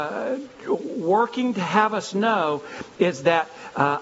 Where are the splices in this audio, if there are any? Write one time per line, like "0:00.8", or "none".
none